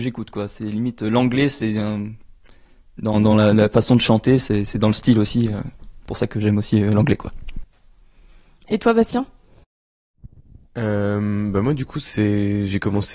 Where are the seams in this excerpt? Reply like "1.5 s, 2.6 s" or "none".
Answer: none